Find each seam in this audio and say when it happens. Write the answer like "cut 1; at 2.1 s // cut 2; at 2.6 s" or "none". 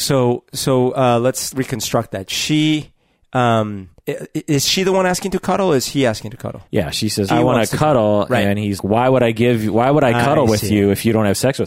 cut 1; at 1.5 s // cut 2; at 4.0 s // cut 3; at 6.7 s // cut 4; at 7.3 s // cut 5; at 8.8 s